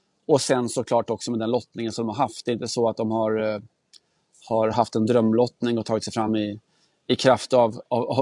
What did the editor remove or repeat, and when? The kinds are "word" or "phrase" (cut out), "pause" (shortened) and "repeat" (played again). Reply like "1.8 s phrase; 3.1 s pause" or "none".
none